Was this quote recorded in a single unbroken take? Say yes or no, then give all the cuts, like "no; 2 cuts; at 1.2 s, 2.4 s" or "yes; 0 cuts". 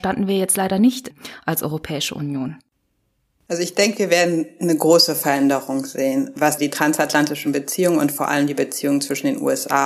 yes; 0 cuts